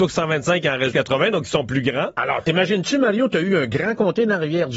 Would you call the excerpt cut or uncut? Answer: cut